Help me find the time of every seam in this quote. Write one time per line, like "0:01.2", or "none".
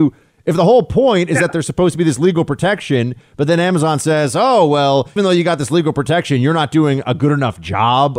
0:05.2